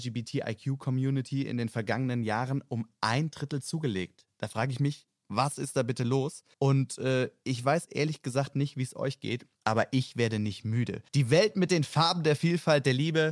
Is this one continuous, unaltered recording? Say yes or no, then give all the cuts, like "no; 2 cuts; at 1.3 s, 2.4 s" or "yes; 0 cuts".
no; 4 cuts; at 4.3 s, 6.5 s, 9.5 s, 11.1 s